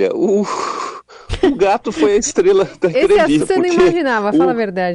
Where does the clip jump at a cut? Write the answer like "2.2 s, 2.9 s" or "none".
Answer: 3.4 s

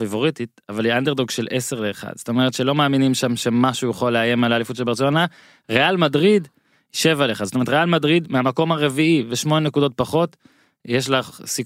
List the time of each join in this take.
none

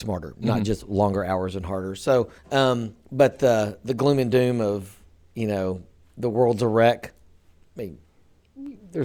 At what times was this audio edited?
2.4 s

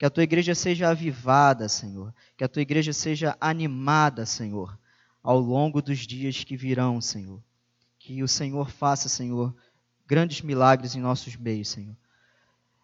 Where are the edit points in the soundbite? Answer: none

